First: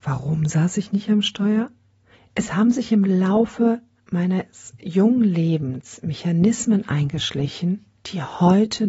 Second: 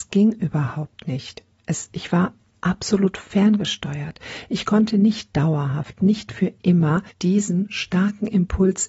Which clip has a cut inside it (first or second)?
second